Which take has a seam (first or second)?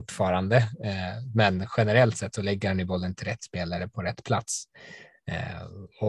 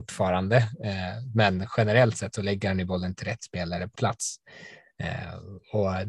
second